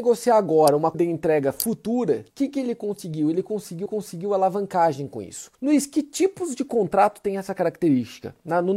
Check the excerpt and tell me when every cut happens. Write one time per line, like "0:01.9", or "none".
0:00.9
0:02.3
0:03.9
0:05.5